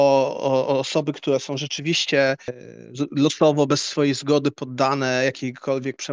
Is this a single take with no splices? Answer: yes; 0 cuts

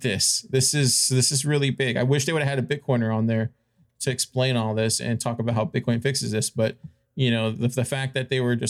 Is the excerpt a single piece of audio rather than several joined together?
yes; 0 cuts

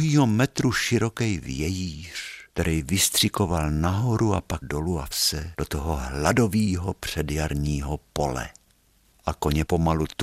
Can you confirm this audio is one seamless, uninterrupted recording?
no; 3 cuts; at 2.5 s, 4.6 s, 5.1 s

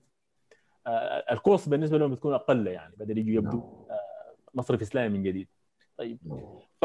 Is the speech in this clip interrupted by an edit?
no; 0 cuts

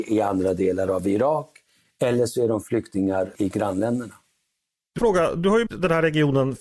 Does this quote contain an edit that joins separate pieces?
yes; 3 cuts; at 3.3 s, 5.0 s, 5.7 s

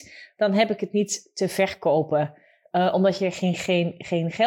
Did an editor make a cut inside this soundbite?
no; 0 cuts

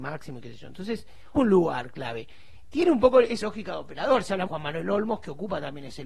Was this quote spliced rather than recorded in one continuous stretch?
yes; 3 cuts; at 1.3 s, 3.4 s, 4.5 s

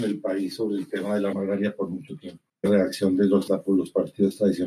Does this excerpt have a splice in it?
yes; 3 cuts; at 1.3 s, 2.7 s, 3.5 s

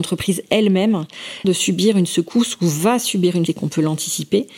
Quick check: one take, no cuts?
no; 2 cuts; at 1.4 s, 3.5 s

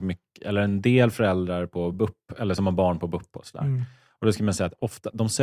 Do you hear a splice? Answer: no; 0 cuts

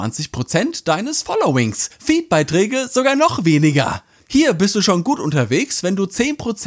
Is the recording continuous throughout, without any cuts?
yes; 0 cuts

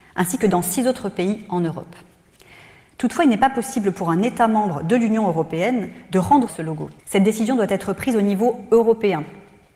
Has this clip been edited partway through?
yes; 2 cuts; at 6.5 s, 7.0 s

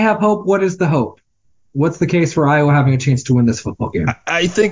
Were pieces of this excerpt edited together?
no; 0 cuts

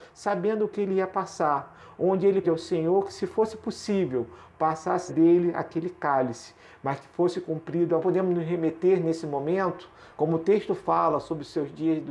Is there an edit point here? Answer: yes; 3 cuts; at 2.4 s, 5.1 s, 8.0 s

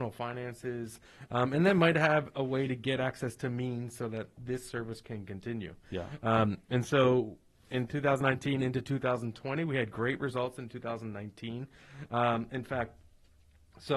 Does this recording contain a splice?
no; 0 cuts

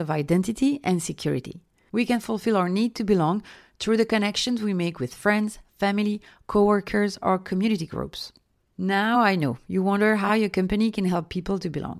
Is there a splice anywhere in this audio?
no; 0 cuts

